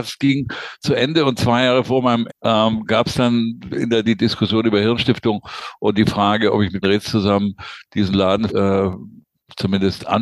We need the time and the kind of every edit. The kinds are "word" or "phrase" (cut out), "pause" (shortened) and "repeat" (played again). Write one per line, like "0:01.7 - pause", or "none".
0:02.3 - word
0:04.0 - word
0:06.8 - word
0:08.5 - word

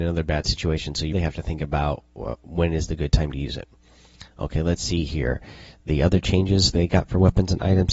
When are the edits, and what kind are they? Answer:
0:01.1 - word

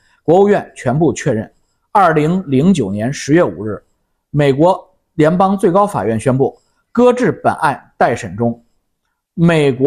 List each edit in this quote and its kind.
none

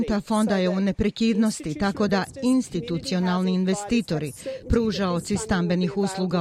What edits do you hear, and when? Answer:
none

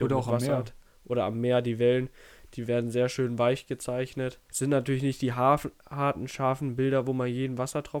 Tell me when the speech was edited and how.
0:04.4 - pause

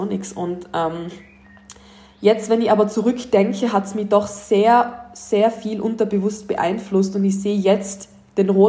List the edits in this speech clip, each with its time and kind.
none

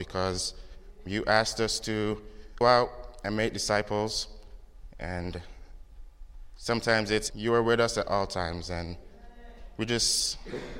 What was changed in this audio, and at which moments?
0:01.1 - word
0:02.6 - word
0:07.3 - phrase

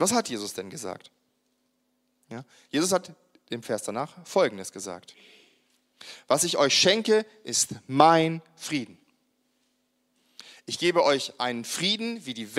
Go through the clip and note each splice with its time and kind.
none

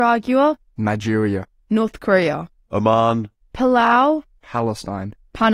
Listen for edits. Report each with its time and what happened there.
none

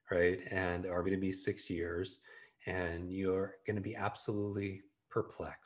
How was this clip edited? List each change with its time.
0:01.0 - word

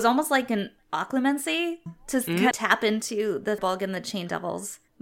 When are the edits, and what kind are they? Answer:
0:01.9 - word
0:02.5 - word
0:03.6 - word

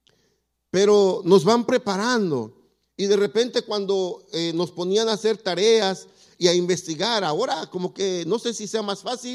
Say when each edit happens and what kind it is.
none

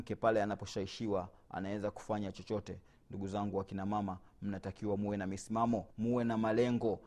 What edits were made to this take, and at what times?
0:05.9 - pause

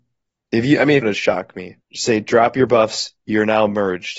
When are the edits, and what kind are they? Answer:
0:01.0 - phrase
0:01.8 - pause

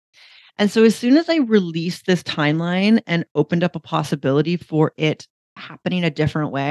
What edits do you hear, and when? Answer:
none

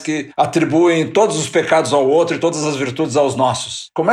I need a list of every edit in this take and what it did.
none

